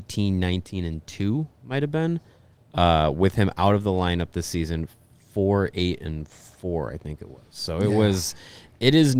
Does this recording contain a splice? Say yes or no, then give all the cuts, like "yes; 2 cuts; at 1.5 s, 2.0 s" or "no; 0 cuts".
no; 0 cuts